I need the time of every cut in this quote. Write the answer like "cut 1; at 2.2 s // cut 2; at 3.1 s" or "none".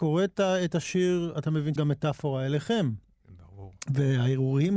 cut 1; at 1.8 s